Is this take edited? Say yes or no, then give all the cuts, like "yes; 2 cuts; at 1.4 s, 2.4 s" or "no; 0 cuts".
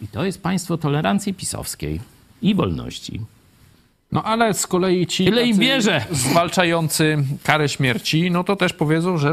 no; 0 cuts